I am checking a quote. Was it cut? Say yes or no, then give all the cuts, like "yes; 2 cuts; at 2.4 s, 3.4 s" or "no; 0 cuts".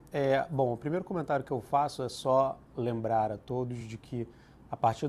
no; 0 cuts